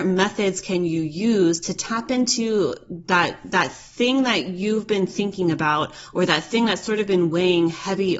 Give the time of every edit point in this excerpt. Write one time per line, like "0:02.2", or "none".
none